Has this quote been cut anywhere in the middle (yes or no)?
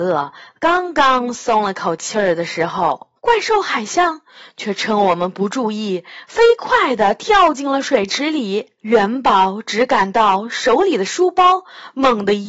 yes